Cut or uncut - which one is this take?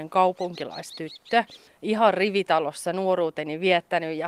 cut